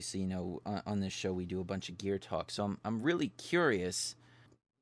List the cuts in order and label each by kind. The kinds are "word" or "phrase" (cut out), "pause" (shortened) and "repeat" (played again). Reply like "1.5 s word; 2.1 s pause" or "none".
none